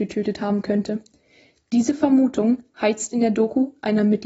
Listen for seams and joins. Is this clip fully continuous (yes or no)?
yes